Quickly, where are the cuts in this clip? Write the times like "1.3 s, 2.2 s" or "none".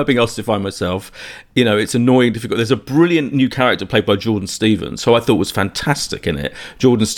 none

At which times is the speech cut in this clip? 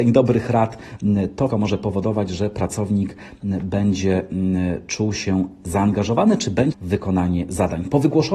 1.5 s, 6.7 s

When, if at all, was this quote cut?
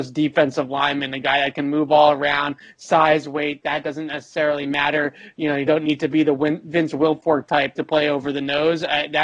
none

